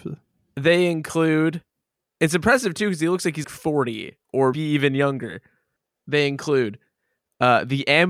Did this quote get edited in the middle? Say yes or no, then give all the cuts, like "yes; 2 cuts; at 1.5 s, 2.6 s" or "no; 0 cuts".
yes; 2 cuts; at 3.4 s, 4.5 s